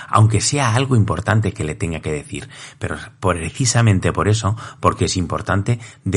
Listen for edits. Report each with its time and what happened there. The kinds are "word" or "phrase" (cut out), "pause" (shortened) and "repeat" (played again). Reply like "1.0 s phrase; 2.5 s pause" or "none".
none